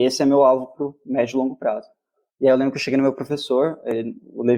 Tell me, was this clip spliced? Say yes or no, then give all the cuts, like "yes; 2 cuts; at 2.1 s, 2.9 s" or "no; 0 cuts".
no; 0 cuts